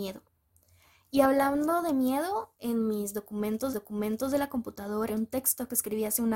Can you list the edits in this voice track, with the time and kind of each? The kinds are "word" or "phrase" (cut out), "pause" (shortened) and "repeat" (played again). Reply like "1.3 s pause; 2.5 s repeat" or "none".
3.7 s repeat; 5.1 s word